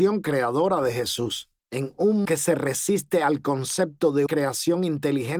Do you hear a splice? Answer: yes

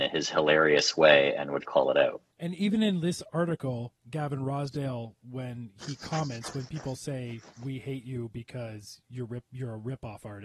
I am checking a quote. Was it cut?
yes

